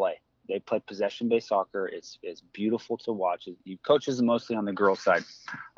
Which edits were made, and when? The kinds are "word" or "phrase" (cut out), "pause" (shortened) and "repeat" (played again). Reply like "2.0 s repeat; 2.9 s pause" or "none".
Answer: none